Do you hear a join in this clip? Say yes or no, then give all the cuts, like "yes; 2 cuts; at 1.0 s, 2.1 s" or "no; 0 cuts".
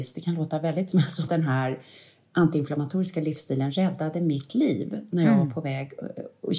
yes; 2 cuts; at 0.9 s, 1.3 s